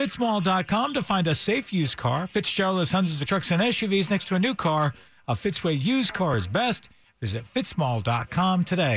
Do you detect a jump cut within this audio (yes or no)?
yes